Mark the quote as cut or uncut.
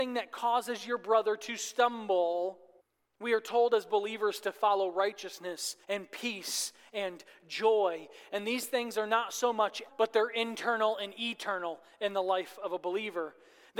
cut